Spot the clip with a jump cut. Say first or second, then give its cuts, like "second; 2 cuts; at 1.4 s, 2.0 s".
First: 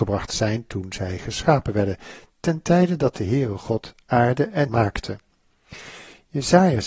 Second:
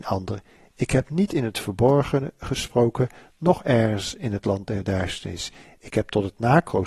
first; 1 cut; at 4.7 s